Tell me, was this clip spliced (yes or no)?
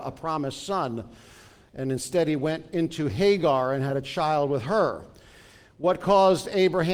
no